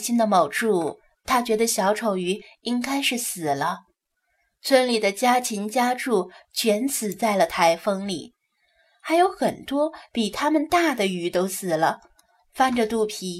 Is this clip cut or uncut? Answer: uncut